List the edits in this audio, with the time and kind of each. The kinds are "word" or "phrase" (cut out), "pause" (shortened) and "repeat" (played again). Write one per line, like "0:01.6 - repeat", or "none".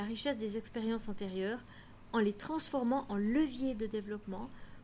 none